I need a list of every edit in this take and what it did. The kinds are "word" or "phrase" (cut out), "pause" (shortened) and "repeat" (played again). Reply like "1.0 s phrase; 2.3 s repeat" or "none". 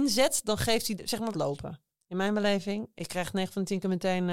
1.0 s phrase; 1.3 s phrase